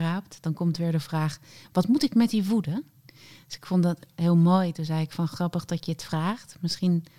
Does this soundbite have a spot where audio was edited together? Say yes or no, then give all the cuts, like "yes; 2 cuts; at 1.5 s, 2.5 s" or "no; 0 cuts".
no; 0 cuts